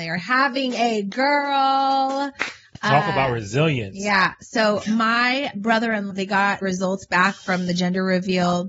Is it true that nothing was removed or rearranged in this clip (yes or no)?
no